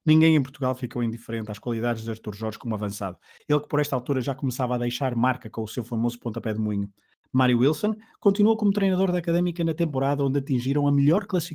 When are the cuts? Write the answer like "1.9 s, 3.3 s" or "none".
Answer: none